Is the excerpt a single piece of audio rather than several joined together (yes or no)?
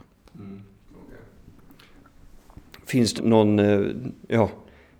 no